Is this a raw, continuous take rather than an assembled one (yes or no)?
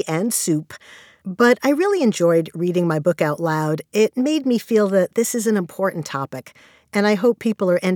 yes